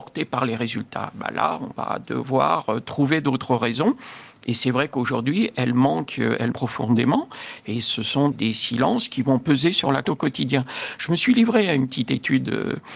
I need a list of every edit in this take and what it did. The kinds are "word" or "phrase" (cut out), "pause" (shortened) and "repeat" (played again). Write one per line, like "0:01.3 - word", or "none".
0:06.5 - word
0:08.3 - word
0:10.0 - word